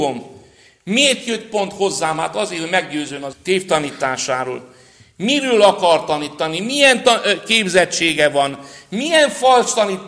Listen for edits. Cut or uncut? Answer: cut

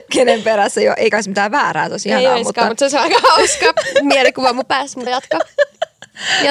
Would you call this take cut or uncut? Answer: cut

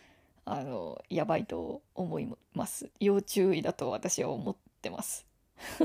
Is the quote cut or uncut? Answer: cut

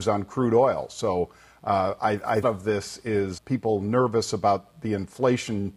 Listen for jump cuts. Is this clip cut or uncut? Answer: cut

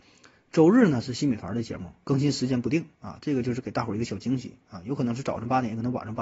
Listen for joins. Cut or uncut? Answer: cut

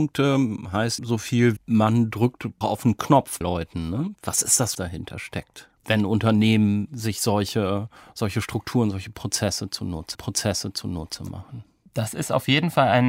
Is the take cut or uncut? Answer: cut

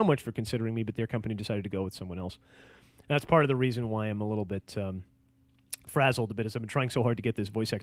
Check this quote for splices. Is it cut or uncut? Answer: uncut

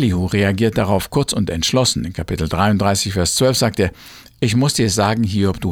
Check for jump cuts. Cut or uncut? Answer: uncut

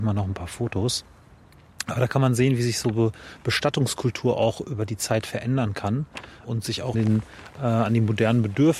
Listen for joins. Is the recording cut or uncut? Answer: cut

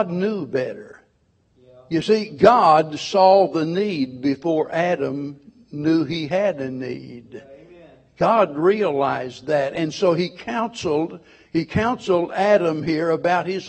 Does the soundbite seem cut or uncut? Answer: uncut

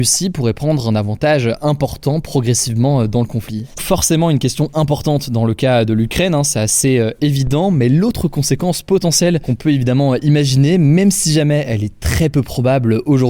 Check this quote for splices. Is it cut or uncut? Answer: cut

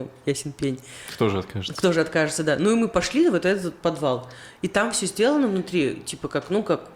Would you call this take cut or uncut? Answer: uncut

